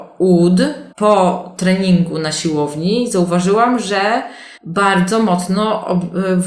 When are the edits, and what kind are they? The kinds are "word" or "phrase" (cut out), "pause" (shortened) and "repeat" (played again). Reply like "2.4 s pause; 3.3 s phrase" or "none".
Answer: 0.9 s pause; 4.6 s pause